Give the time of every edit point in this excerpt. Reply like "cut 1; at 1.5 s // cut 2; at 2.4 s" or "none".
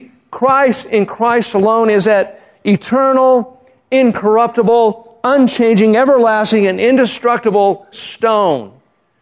cut 1; at 7.9 s